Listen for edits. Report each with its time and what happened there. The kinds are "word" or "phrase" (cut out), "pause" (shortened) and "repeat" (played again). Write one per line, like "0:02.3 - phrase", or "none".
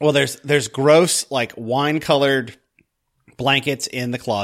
none